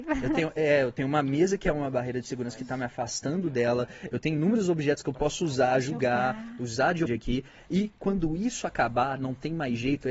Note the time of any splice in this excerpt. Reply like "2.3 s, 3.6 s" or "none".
7.1 s